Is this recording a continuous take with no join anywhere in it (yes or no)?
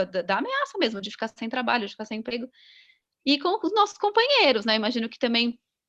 yes